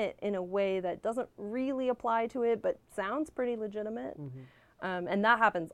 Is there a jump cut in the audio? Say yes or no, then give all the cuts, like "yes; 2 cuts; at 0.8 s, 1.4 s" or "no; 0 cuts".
yes; 1 cut; at 2.8 s